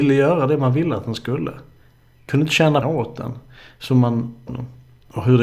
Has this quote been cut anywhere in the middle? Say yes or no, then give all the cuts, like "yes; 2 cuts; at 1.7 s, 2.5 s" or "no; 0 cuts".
yes; 2 cuts; at 2.8 s, 4.5 s